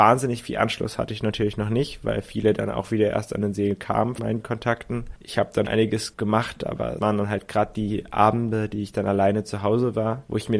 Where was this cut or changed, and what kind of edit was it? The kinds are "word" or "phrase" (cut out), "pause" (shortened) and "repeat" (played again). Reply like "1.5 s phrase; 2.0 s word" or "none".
4.2 s word; 5.7 s word; 7.0 s word